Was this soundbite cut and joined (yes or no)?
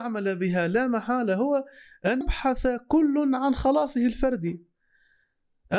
yes